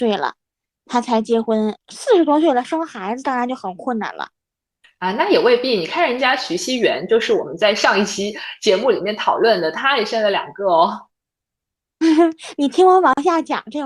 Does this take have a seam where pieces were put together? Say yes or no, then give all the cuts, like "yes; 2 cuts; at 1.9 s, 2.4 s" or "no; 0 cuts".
no; 0 cuts